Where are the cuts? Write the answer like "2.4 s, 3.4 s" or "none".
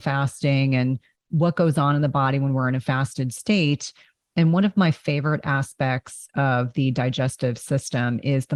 none